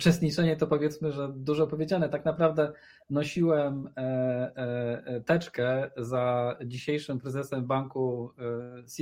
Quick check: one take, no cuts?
yes; 0 cuts

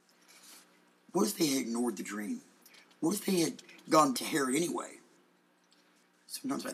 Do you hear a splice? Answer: yes; 2 cuts; at 2.6 s, 4.1 s

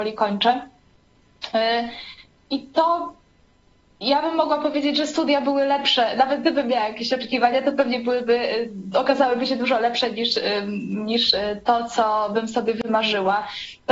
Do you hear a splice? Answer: no; 0 cuts

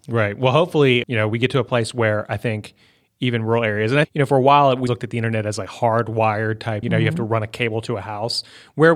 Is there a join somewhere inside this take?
yes; 4 cuts; at 1.0 s, 4.0 s, 4.9 s, 6.8 s

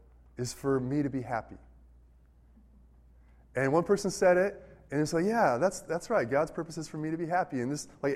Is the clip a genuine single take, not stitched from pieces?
yes; 0 cuts

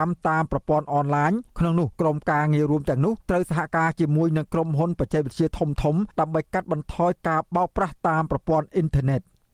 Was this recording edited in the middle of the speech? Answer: yes; 4 cuts; at 1.5 s, 1.9 s, 3.2 s, 6.1 s

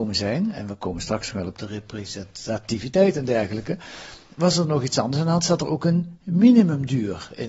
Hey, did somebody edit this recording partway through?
no; 0 cuts

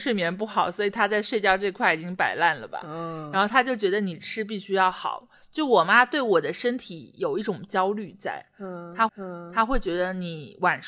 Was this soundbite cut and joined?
yes; 1 cut; at 9.1 s

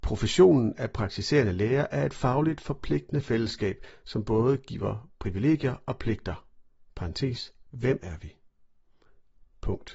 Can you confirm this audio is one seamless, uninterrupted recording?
yes; 0 cuts

